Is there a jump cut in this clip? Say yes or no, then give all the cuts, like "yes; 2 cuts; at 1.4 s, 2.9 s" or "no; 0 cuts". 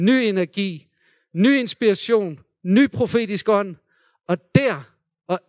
no; 0 cuts